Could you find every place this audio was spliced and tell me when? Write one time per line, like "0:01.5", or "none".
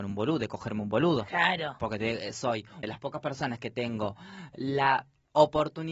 0:02.8